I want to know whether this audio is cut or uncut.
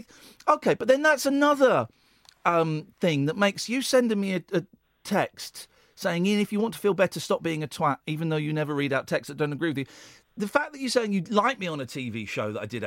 uncut